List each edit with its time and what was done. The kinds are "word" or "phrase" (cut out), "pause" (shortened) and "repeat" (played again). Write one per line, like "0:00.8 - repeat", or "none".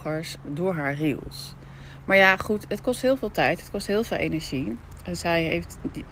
none